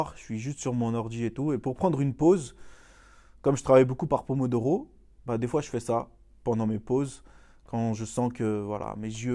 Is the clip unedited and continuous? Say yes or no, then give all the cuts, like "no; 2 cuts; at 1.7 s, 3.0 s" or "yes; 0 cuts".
yes; 0 cuts